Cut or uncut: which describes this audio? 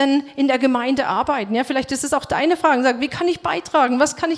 uncut